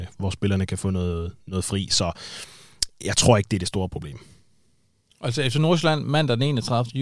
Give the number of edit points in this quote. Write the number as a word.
zero